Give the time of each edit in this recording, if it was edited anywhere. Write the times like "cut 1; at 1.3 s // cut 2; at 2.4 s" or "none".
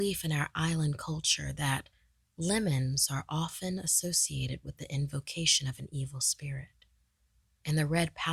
none